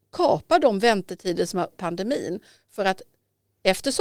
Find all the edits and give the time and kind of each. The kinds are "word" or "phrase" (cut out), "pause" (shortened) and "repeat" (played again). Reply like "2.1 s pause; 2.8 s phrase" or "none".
1.7 s phrase